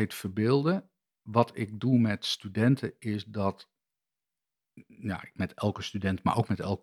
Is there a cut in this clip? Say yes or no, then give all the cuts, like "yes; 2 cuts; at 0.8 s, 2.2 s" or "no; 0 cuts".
no; 0 cuts